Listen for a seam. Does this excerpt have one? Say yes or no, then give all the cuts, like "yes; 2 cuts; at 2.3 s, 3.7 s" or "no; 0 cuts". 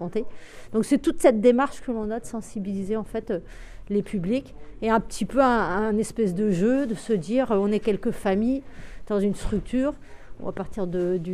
no; 0 cuts